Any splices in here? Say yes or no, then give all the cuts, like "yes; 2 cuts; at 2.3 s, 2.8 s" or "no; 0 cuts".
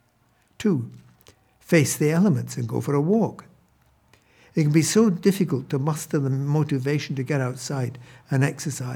no; 0 cuts